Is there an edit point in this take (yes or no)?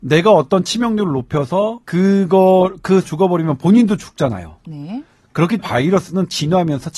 yes